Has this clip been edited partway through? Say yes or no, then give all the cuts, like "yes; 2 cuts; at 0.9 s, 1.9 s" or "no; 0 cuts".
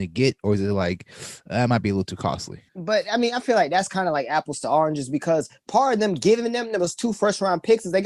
yes; 1 cut; at 2.7 s